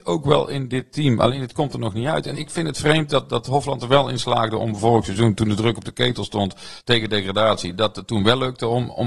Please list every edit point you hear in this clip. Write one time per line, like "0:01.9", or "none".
0:02.3
0:06.8